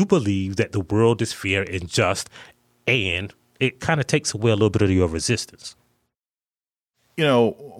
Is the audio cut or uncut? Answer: uncut